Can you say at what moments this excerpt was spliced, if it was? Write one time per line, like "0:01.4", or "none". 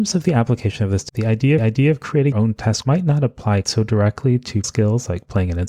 0:01.1
0:01.6
0:02.3
0:02.8
0:03.6
0:04.6